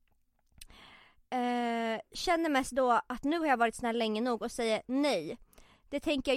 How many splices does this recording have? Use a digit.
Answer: 0